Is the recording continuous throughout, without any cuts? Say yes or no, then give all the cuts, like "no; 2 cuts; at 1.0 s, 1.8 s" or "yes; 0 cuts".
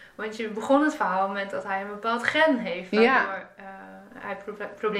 yes; 0 cuts